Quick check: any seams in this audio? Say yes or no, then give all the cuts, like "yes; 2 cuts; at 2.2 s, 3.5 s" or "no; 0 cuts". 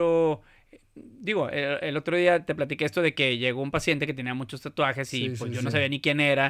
no; 0 cuts